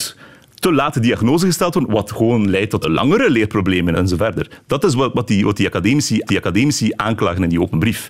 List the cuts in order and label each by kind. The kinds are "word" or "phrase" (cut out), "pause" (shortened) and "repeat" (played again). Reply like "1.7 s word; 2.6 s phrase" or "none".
2.8 s word; 3.9 s word; 6.3 s repeat